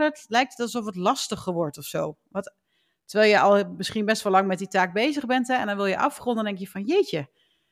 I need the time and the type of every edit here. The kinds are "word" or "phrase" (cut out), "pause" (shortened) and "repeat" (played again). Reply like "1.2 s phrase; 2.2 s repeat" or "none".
none